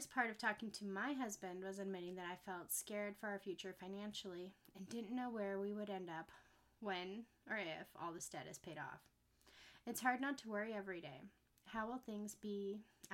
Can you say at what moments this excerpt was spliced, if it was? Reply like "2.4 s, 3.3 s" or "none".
none